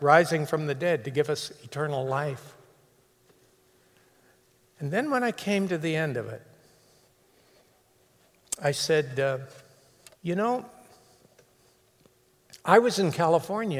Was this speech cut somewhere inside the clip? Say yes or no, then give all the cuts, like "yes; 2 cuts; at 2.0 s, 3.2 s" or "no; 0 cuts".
yes; 1 cut; at 10.2 s